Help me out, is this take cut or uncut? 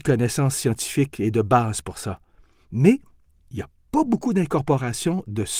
uncut